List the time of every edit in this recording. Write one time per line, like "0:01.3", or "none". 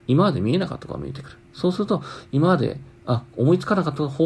0:03.0

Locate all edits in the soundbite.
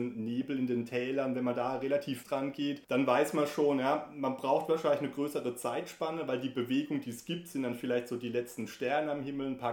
0:02.2
0:02.8

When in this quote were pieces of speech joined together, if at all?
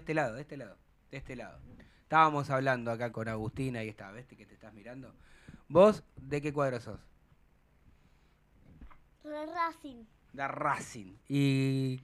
0:01.0
0:03.1

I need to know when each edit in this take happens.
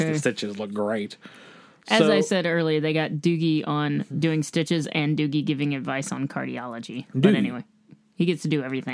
none

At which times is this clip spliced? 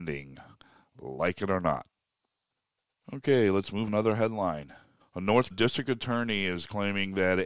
0:02.5
0:03.9
0:05.0
0:05.5

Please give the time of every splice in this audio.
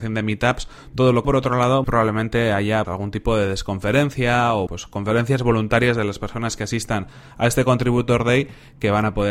0:01.2
0:01.8
0:02.8
0:04.7

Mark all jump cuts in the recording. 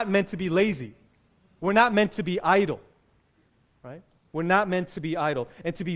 none

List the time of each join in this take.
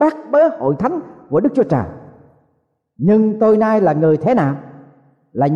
none

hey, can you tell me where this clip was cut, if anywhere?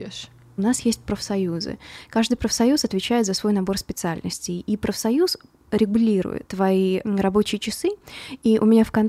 none

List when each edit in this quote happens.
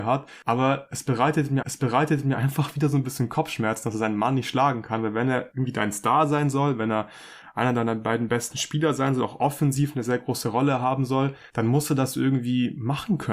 0:01.6

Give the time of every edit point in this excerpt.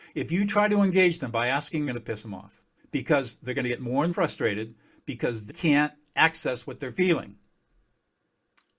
0:01.9
0:02.8
0:04.1
0:05.5

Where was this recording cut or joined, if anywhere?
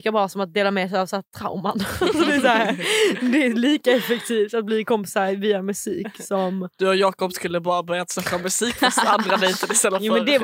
none

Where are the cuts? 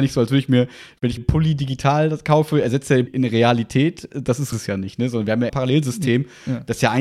0:01.2
0:03.1
0:04.5
0:05.5

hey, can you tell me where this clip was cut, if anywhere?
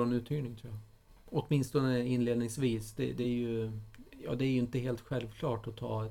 none

